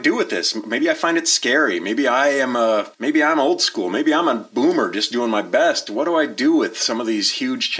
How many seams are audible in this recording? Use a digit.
1